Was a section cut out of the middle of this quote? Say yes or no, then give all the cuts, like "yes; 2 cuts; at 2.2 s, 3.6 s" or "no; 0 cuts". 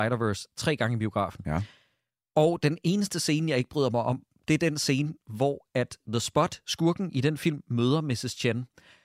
no; 0 cuts